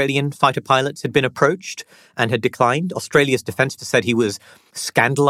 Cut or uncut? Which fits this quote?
cut